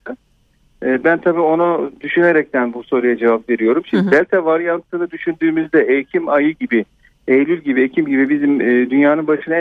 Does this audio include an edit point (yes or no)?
no